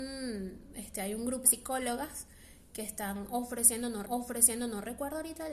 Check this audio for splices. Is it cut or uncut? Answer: cut